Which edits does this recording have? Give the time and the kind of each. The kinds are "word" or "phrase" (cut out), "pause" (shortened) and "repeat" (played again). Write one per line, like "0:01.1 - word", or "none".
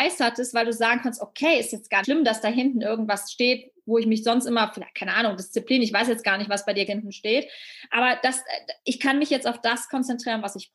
0:02.0 - word
0:06.9 - word